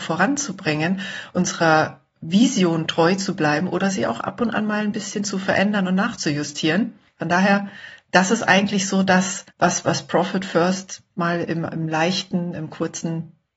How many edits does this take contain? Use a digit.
2